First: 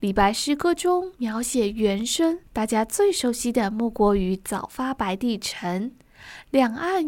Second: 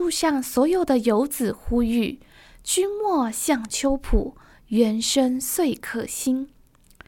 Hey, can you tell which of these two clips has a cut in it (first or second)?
first